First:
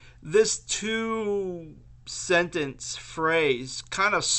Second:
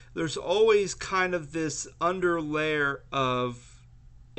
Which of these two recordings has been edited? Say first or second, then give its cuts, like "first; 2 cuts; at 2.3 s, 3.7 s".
first; 1 cut; at 2.0 s